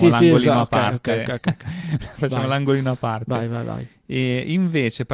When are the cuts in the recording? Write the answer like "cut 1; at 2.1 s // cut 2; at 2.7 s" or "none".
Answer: cut 1; at 1.4 s